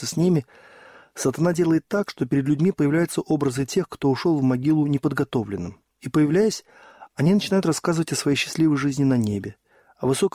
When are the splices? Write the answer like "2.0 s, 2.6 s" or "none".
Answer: none